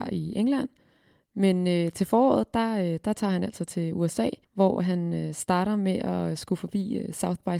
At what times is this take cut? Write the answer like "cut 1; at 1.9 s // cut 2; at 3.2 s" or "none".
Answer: cut 1; at 4.4 s